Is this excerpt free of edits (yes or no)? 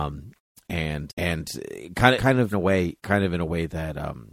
no